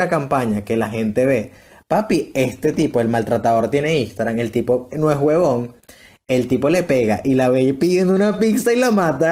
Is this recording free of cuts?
yes; 0 cuts

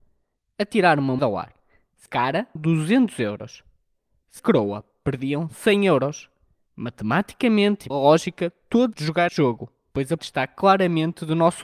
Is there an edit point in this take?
yes; 8 cuts; at 1.2 s, 2.1 s, 2.6 s, 4.4 s, 7.9 s, 8.9 s, 9.3 s, 10.2 s

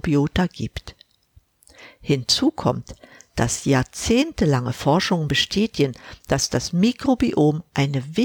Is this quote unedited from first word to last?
yes; 0 cuts

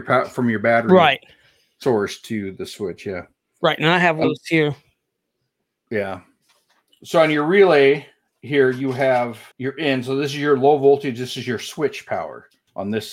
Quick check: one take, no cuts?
no; 2 cuts; at 4.2 s, 9.5 s

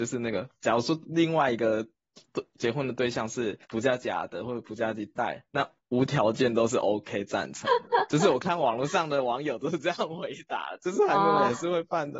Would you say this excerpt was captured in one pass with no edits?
no; 2 cuts; at 3.6 s, 5.5 s

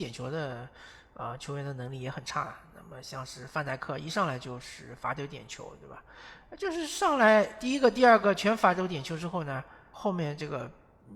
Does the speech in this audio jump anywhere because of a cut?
yes; 1 cut; at 9.9 s

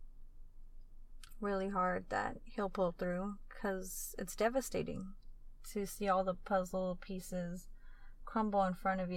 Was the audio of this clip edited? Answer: no; 0 cuts

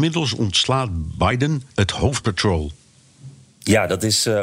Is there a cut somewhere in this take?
yes; 2 cuts; at 1.7 s, 2.2 s

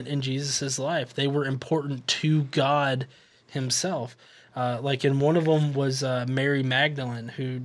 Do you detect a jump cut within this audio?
no; 0 cuts

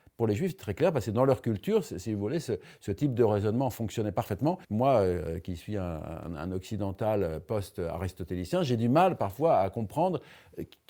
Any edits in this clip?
yes; 1 cut; at 4.6 s

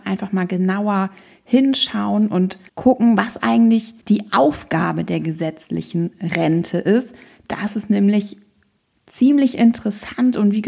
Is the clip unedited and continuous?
no; 2 cuts; at 2.7 s, 4.0 s

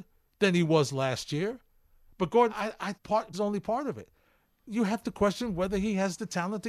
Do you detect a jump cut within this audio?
yes; 3 cuts; at 2.5 s, 2.9 s, 3.3 s

